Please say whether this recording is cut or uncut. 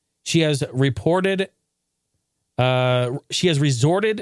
uncut